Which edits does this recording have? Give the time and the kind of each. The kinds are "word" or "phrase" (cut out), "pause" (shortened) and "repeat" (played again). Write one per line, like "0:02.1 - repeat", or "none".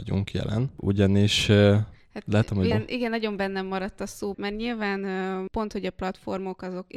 0:02.7 - phrase
0:04.3 - word